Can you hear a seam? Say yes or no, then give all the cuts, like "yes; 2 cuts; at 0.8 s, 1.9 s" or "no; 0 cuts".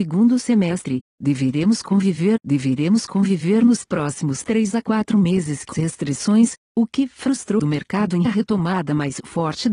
yes; 4 cuts; at 2.4 s, 5.7 s, 7.6 s, 8.3 s